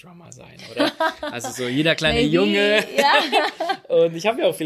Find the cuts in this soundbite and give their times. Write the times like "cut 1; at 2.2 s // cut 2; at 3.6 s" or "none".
none